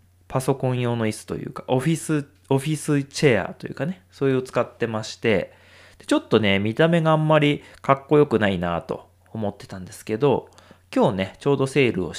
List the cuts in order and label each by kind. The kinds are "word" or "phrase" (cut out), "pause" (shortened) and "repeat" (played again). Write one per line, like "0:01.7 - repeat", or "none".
none